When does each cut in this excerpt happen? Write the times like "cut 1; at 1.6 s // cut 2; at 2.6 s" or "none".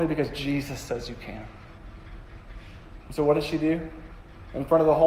none

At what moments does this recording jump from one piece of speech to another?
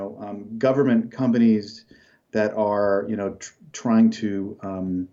none

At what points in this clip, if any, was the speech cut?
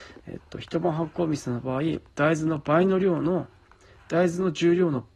none

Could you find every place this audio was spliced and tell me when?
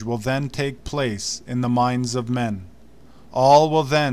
none

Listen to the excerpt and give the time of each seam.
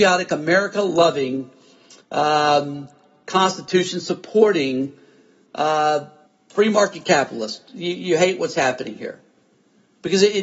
cut 1; at 2.0 s // cut 2; at 6.3 s

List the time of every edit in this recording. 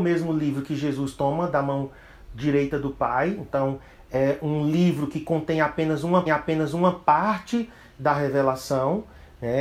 cut 1; at 6.3 s

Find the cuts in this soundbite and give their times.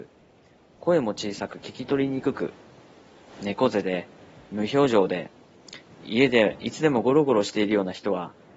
none

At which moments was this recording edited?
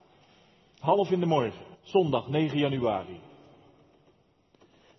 cut 1; at 1.1 s // cut 2; at 1.7 s

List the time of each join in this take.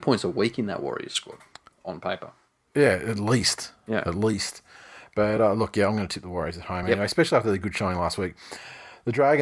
none

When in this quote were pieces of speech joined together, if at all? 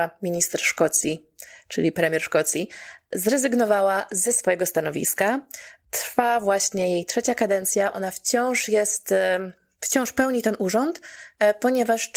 none

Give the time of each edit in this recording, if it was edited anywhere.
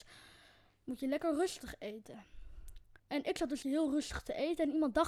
cut 1; at 3.0 s // cut 2; at 3.6 s

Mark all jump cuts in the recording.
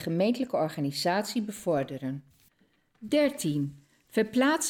none

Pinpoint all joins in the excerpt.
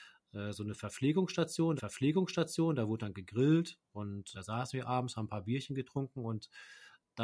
cut 1; at 1.8 s // cut 2; at 4.3 s

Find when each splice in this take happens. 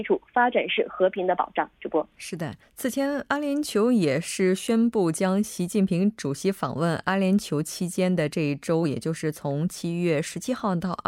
cut 1; at 2.6 s

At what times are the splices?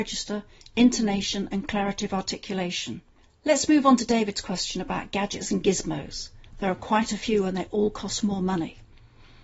cut 1; at 3.2 s

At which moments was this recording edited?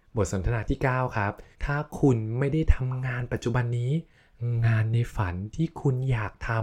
cut 1; at 1.5 s

